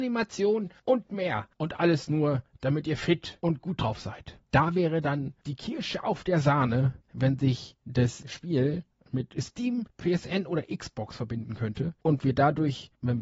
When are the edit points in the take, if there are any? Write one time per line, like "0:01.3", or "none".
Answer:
none